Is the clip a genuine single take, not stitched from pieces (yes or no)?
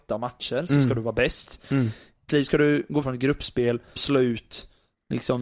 no